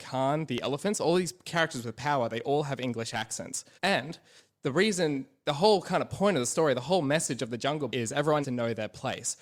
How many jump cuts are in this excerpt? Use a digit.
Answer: 3